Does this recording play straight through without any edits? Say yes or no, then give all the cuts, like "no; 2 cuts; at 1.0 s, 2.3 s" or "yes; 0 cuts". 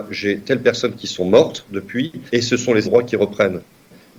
no; 2 cuts; at 2.3 s, 2.8 s